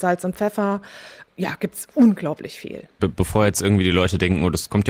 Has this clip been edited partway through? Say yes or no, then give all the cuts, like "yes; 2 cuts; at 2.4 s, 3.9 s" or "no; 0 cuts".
no; 0 cuts